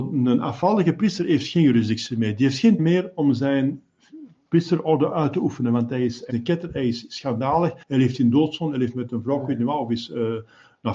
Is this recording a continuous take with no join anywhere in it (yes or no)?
no